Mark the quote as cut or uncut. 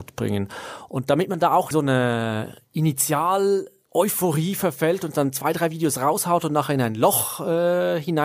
cut